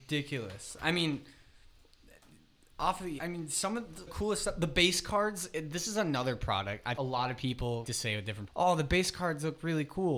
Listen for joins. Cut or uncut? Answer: cut